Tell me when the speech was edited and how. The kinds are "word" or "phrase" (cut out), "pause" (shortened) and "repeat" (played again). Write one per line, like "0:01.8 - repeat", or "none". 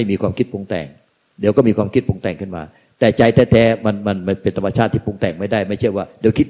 none